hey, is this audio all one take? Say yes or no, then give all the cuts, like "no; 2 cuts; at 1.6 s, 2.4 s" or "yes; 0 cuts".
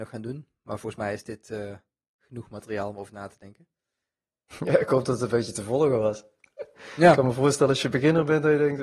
yes; 0 cuts